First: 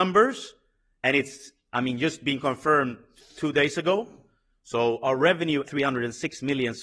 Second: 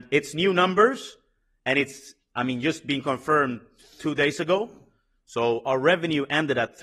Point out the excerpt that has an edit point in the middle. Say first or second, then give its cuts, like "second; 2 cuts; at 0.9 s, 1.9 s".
first; 1 cut; at 5.6 s